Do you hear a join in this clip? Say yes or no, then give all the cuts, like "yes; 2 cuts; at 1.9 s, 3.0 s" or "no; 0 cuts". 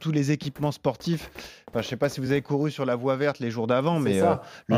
no; 0 cuts